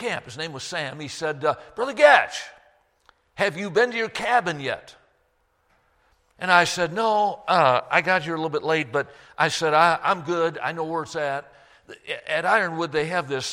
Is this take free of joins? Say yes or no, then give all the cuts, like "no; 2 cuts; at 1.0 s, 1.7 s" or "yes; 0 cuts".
yes; 0 cuts